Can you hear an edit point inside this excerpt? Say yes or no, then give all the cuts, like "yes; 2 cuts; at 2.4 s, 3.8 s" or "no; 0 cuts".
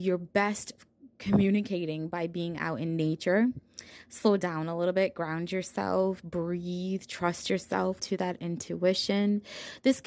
yes; 1 cut; at 8.0 s